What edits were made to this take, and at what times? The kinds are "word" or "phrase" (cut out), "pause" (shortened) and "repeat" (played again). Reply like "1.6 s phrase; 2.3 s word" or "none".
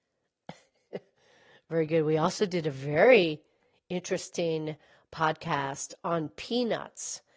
none